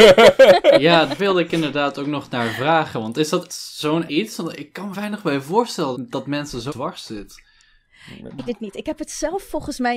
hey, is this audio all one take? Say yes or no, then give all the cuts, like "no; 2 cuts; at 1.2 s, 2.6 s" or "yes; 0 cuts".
no; 7 cuts; at 1.2 s, 3.5 s, 4.1 s, 4.9 s, 5.9 s, 6.7 s, 8.5 s